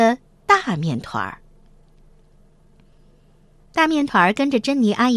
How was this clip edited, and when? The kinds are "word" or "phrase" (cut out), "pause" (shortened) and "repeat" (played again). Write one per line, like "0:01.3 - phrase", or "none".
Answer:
none